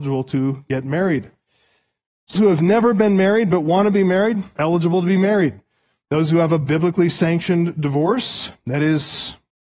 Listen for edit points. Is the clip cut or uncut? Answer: cut